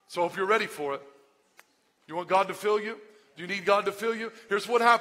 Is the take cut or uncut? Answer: uncut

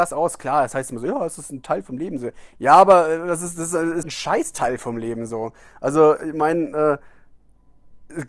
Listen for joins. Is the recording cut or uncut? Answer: cut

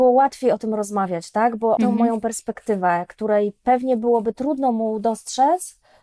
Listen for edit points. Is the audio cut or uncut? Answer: cut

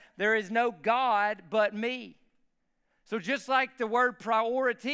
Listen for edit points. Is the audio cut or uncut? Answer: uncut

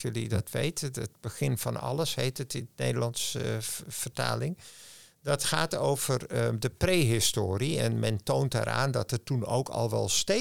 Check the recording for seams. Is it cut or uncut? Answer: uncut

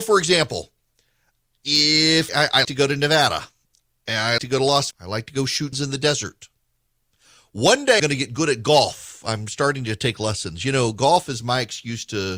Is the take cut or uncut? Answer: cut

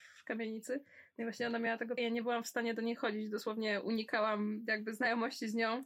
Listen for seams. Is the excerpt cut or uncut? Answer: cut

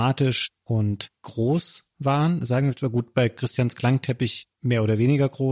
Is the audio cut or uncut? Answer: cut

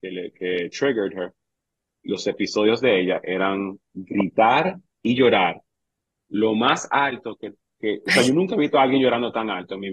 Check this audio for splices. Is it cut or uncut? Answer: uncut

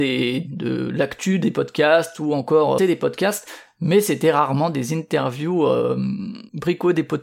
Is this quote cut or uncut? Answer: cut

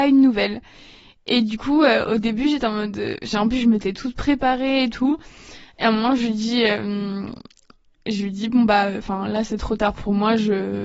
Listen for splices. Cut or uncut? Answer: uncut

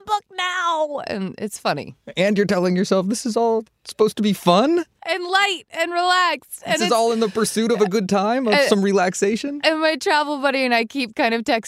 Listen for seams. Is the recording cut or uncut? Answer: uncut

